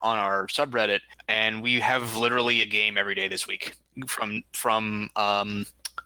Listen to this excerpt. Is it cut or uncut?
uncut